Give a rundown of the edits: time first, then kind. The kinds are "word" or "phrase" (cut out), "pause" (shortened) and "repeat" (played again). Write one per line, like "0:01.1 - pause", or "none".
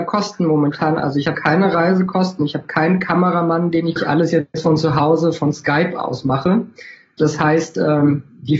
0:01.3 - word
0:04.0 - phrase